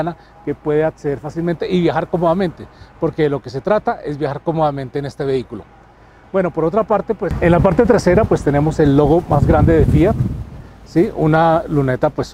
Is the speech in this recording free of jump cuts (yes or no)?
yes